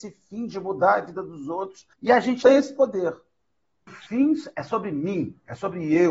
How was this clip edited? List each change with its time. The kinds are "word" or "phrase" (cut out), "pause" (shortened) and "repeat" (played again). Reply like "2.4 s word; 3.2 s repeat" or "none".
1.9 s pause; 2.4 s word; 3.9 s word